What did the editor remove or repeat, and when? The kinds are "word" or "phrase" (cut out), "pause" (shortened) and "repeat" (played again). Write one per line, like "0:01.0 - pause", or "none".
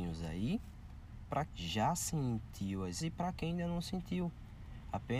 0:01.5 - word
0:03.0 - word